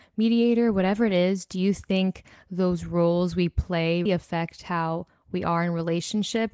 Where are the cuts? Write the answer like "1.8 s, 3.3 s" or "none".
4.1 s